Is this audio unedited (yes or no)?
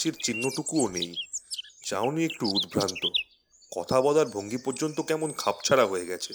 yes